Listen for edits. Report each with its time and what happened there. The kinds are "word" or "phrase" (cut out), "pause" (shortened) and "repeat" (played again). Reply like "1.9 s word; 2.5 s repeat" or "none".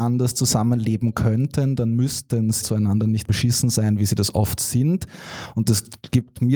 2.6 s word; 3.2 s word